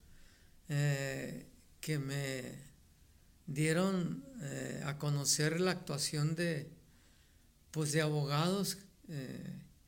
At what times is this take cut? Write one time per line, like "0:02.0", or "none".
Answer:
none